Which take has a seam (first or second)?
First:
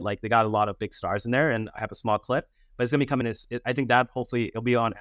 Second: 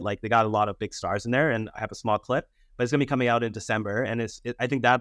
first